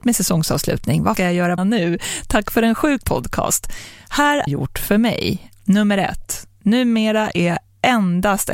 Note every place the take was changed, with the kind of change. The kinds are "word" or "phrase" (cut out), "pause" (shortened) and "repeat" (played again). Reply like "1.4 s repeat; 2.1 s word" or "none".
1.2 s phrase; 1.6 s phrase; 3.0 s word; 4.5 s phrase